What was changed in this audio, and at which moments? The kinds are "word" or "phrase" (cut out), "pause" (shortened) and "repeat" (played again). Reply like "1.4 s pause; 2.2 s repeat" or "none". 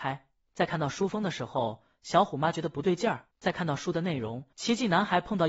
3.3 s pause; 4.5 s pause